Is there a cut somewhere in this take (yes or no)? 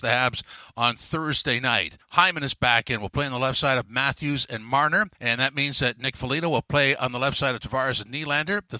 yes